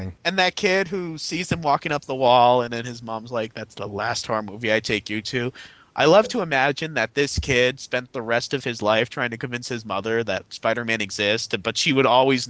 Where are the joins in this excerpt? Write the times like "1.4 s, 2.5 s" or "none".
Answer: none